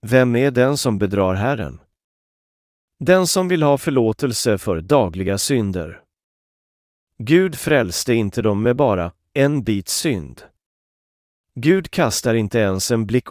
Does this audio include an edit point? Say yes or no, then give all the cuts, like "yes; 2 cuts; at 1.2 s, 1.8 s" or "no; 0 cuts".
no; 0 cuts